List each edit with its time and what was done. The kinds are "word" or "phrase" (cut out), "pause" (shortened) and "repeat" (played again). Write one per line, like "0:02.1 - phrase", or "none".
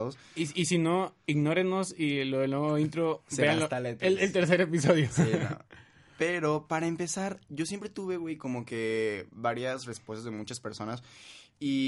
none

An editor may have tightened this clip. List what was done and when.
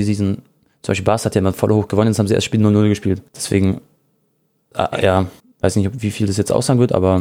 0:03.3 - pause
0:05.4 - pause

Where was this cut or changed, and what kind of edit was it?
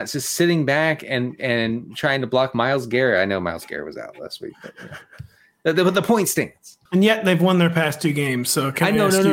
0:06.8 - pause

